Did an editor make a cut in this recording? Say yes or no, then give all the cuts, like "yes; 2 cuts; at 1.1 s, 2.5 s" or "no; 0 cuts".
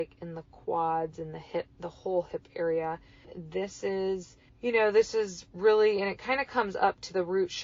yes; 1 cut; at 1.7 s